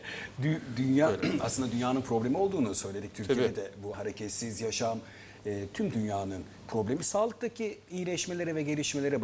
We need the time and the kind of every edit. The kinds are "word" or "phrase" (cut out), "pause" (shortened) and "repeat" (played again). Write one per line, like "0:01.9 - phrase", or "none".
0:03.9 - phrase